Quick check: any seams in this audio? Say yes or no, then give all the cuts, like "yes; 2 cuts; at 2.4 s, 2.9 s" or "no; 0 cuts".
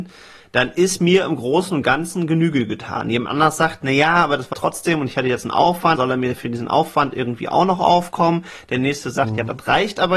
yes; 2 cuts; at 4.5 s, 6.0 s